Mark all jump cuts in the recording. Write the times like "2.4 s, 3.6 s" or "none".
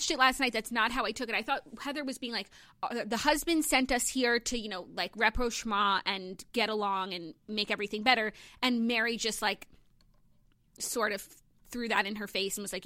6.5 s

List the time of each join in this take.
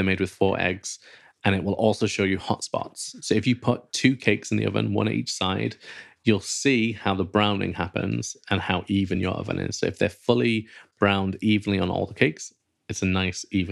none

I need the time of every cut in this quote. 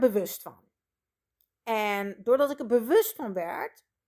none

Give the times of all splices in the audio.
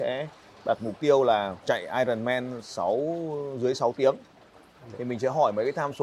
1.6 s

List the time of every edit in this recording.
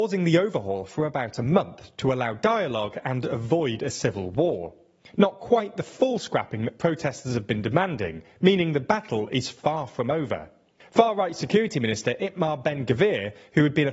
none

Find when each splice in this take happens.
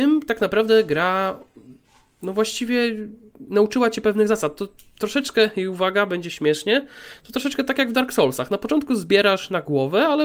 none

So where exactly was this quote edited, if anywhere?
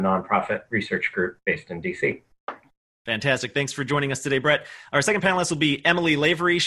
none

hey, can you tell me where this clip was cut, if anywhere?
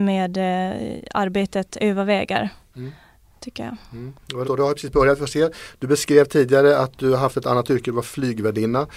4.4 s

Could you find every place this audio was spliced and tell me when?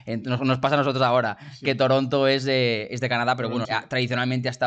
3.6 s

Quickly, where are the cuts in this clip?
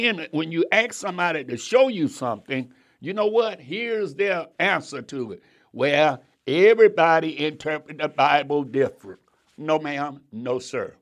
4.5 s

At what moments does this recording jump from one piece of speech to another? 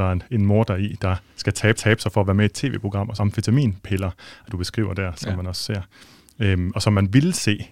1.8 s, 3.2 s, 4.5 s

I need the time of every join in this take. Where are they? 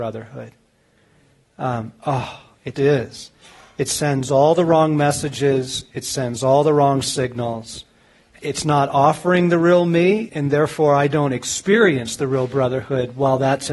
2.7 s, 10.3 s

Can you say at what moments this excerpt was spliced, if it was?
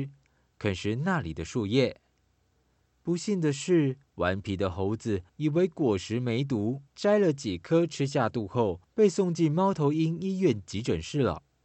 4.0 s, 5.3 s, 6.9 s

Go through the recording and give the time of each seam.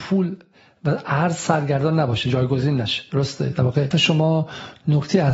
3.9 s

